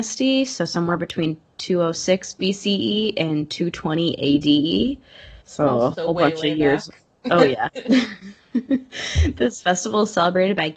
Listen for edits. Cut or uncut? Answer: cut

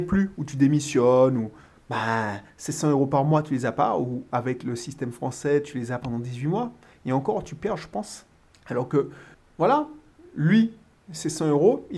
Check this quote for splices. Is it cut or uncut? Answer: uncut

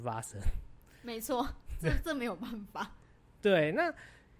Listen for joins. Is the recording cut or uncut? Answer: uncut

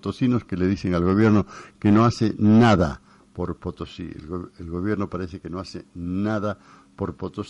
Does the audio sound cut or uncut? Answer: uncut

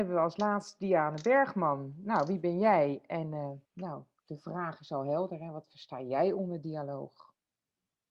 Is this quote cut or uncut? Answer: cut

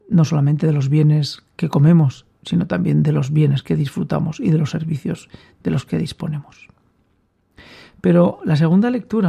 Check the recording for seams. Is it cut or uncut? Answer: uncut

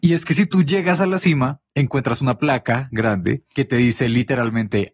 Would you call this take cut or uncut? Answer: uncut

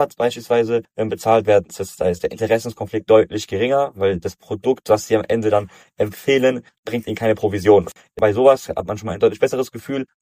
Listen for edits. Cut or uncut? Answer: uncut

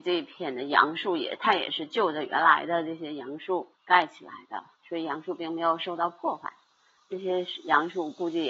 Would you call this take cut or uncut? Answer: cut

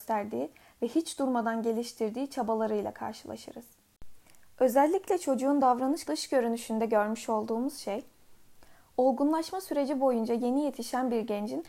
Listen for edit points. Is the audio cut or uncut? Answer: cut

